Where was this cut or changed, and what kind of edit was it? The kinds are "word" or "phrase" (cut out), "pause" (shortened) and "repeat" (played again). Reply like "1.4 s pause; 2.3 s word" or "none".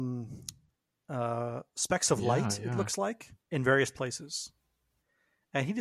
3.4 s pause